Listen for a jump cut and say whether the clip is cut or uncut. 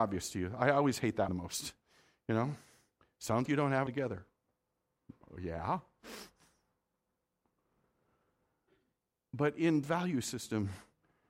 cut